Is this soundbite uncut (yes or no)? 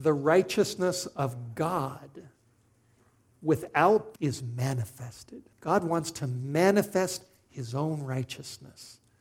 no